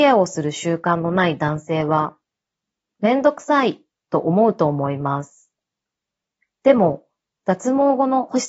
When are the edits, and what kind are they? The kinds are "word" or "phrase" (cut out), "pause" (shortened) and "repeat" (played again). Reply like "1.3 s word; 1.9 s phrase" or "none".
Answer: none